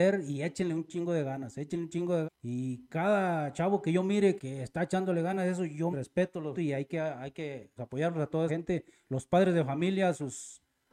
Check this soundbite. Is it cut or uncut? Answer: cut